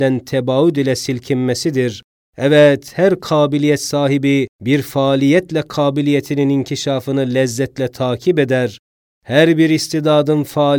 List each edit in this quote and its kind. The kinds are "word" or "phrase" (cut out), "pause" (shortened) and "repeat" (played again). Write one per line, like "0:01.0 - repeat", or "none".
0:04.5 - pause